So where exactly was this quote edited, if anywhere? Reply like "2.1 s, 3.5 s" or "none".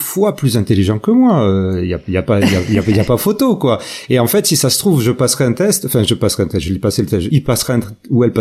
7.3 s